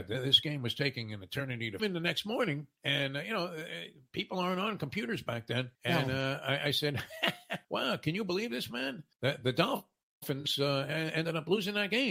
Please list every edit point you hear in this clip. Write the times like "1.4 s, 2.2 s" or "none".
1.8 s, 5.7 s, 7.6 s, 9.1 s